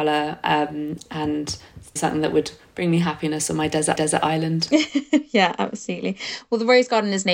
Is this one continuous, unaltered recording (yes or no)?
no